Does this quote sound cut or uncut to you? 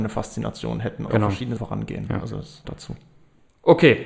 cut